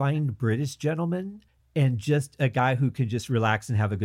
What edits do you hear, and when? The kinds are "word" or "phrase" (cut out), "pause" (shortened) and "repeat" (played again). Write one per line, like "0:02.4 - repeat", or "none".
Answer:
0:01.5 - pause